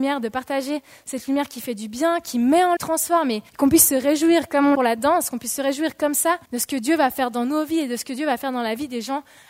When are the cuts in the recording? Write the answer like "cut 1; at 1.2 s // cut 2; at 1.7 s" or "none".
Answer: cut 1; at 2.8 s // cut 2; at 3.5 s // cut 3; at 4.7 s // cut 4; at 6.5 s